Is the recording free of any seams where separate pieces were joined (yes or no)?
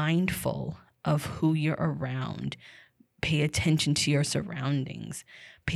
yes